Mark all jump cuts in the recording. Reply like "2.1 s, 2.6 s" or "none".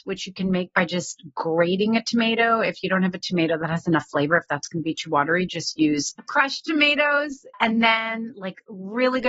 6.2 s, 7.5 s